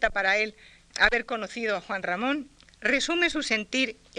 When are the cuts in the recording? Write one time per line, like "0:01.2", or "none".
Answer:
none